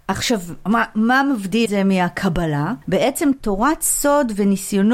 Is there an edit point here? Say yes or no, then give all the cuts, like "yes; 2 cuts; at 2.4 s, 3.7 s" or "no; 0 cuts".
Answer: yes; 2 cuts; at 1.7 s, 2.8 s